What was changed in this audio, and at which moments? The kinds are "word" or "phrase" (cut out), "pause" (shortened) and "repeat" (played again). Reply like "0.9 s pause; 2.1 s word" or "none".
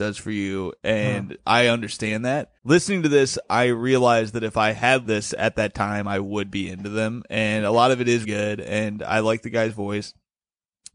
2.6 s pause; 5.0 s phrase; 8.2 s word